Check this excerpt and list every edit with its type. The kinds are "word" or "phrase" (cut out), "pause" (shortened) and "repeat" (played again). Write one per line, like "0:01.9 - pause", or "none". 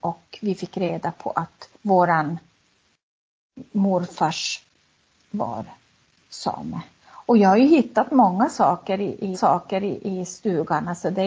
0:01.7 - pause
0:05.2 - word
0:09.3 - repeat